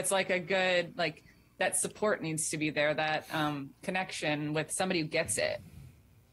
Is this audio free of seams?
yes; 0 cuts

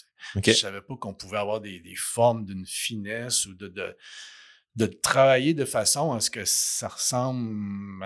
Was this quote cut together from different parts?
no; 0 cuts

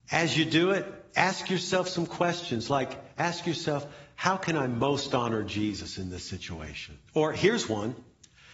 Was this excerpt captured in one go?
no; 1 cut; at 7.1 s

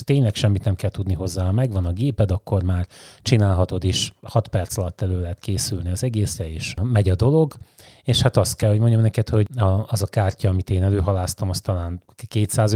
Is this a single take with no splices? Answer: yes; 0 cuts

